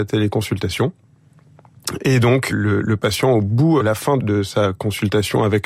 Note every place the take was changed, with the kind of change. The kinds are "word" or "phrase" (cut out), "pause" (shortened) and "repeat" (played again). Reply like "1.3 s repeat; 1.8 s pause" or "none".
2.5 s word; 3.8 s word; 4.2 s word